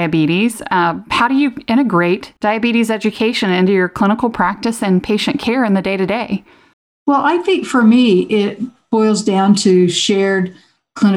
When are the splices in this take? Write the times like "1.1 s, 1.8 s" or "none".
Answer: 2.4 s, 6.7 s